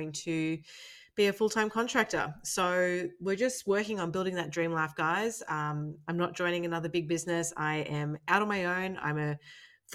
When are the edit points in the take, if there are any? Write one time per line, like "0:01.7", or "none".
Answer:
none